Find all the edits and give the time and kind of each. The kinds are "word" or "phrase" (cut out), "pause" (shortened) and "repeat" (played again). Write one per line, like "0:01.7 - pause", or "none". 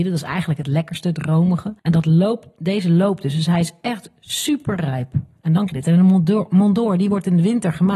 0:01.8 - pause
0:05.7 - word